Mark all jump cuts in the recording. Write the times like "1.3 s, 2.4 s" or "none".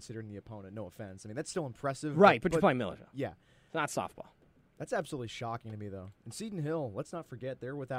none